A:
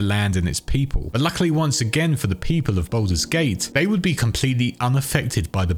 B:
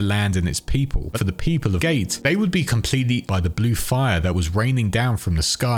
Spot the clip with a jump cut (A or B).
B